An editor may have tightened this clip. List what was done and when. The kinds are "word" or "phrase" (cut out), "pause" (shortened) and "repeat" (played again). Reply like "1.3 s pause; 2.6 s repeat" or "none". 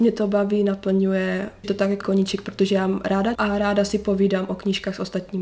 1.6 s word; 2.0 s word; 3.3 s word

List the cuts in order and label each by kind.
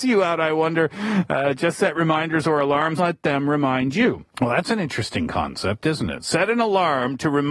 3.0 s phrase; 4.3 s pause

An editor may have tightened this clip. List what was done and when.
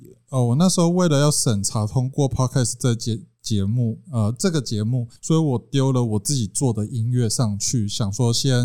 5.2 s pause

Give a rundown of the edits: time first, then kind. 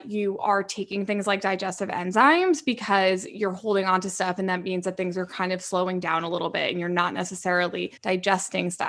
8.0 s pause

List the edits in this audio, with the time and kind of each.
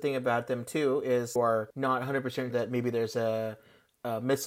1.4 s phrase; 2.5 s word

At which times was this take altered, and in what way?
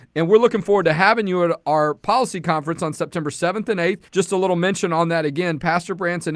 4.1 s pause

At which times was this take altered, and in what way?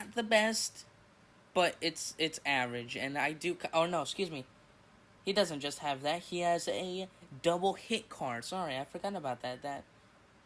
none

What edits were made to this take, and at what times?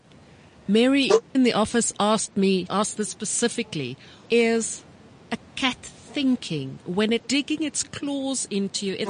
1.3 s word; 2.7 s word; 4.3 s word; 5.0 s pause; 7.2 s word

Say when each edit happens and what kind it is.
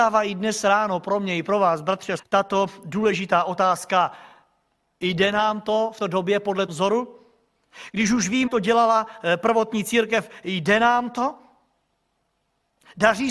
2.2 s word; 6.0 s word; 6.7 s word; 8.5 s word

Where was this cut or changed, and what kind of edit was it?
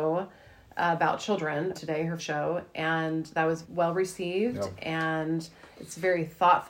1.7 s word; 2.2 s word; 3.6 s word

